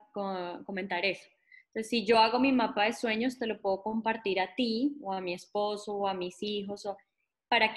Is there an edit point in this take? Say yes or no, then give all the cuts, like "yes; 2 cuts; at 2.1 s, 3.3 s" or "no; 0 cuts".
no; 0 cuts